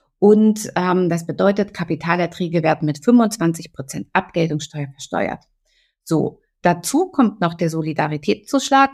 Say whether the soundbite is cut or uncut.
uncut